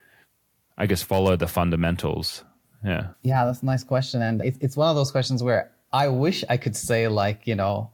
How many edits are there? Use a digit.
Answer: 1